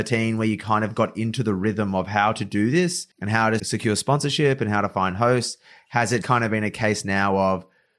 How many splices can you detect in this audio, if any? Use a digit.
3